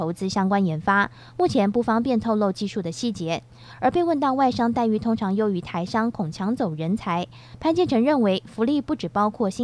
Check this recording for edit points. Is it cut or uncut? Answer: uncut